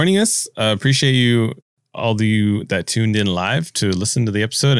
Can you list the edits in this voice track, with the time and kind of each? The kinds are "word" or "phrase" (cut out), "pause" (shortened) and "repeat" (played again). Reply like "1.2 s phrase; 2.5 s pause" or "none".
none